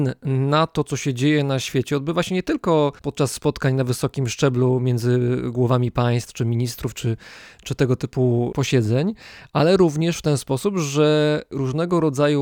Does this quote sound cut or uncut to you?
cut